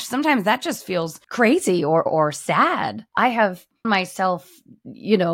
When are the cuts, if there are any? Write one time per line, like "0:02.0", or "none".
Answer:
0:01.2
0:02.1
0:03.1
0:03.8